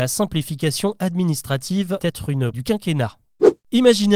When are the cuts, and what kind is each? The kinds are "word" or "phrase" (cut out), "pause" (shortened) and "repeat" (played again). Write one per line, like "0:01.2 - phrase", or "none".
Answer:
0:02.0 - word
0:02.5 - word